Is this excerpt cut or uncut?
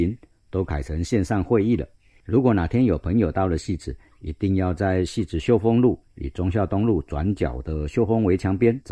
uncut